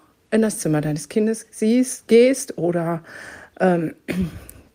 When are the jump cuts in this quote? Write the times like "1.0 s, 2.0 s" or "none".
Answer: none